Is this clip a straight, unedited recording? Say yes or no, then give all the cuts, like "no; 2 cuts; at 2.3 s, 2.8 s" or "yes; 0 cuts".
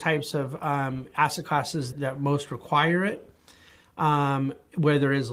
no; 1 cut; at 1.9 s